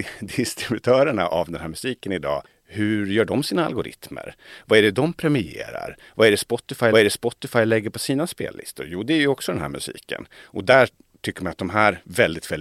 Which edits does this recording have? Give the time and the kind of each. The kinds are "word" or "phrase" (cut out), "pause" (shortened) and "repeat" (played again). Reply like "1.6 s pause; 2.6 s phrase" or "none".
6.9 s repeat